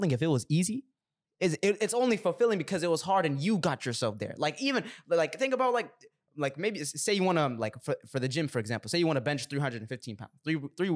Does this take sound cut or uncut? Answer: uncut